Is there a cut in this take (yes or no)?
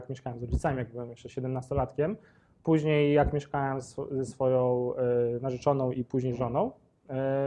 no